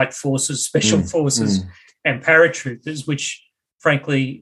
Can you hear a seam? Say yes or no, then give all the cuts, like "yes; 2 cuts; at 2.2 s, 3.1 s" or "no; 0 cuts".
no; 0 cuts